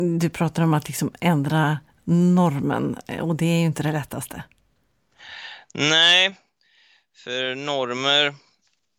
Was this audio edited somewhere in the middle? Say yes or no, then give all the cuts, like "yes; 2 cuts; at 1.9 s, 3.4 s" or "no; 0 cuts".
no; 0 cuts